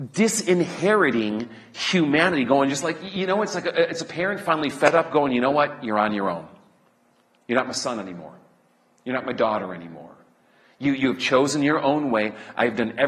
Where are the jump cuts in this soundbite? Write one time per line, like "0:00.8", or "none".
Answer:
none